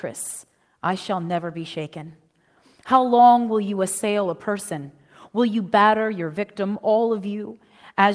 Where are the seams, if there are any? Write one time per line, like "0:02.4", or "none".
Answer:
none